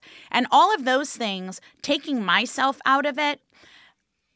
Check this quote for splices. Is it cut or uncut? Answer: uncut